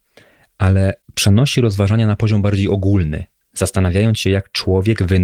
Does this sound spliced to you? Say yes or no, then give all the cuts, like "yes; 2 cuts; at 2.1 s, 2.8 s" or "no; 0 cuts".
yes; 1 cut; at 3.4 s